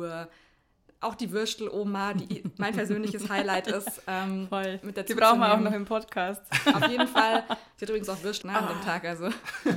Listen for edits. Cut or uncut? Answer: cut